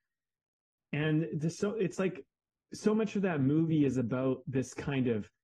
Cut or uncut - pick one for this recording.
uncut